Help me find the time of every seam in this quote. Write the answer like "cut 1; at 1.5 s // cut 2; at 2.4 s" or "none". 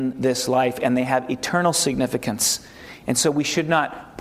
none